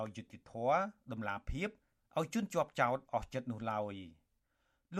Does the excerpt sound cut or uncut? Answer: uncut